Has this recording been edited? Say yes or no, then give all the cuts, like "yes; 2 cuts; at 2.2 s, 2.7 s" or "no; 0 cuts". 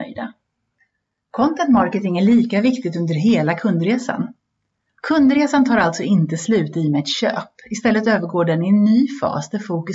no; 0 cuts